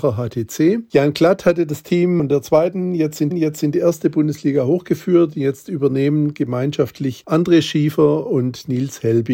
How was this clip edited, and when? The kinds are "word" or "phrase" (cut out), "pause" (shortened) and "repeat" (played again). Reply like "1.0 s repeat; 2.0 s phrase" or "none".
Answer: 3.3 s repeat